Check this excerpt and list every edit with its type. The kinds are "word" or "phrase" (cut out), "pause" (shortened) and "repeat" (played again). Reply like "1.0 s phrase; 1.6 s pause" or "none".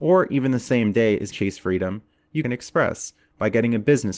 1.3 s word; 2.4 s phrase